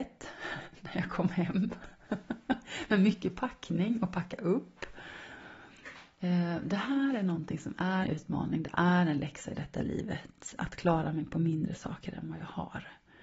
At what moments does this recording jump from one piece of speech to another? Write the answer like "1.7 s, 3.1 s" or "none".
8.0 s